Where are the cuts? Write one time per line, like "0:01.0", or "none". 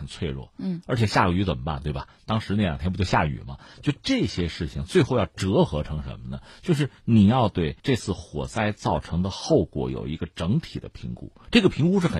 0:07.8